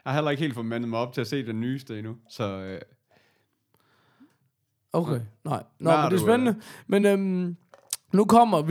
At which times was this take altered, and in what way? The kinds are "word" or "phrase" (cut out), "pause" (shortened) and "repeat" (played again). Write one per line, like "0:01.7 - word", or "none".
none